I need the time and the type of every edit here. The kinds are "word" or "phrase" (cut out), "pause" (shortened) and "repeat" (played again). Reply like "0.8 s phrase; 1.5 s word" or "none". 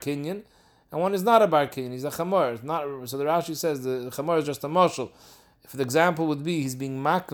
none